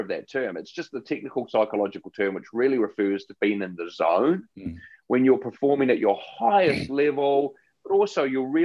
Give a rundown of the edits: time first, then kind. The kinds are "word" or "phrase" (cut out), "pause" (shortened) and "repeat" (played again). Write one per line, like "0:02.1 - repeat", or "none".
none

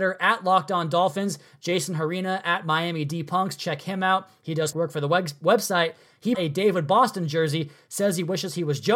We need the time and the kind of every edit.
0:04.7 - word
0:06.3 - word

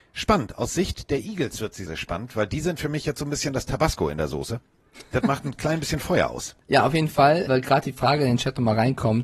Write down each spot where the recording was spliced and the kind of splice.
0:01.9 - word
0:06.6 - pause
0:07.5 - word

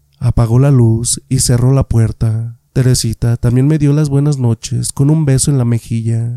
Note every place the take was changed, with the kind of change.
0:02.7 - pause

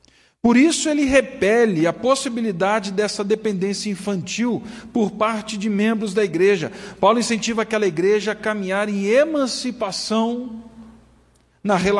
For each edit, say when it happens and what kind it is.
none

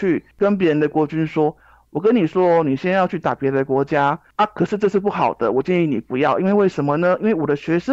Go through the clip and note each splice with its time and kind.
none

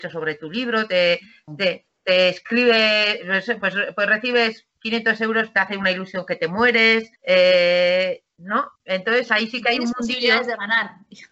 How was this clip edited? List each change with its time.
0:04.7 - pause
0:07.2 - pause
0:08.8 - pause

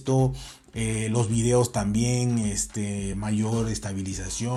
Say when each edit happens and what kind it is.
none

